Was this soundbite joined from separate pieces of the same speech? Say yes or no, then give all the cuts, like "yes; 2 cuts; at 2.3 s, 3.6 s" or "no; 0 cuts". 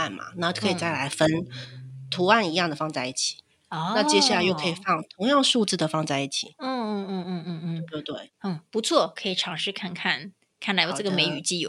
no; 0 cuts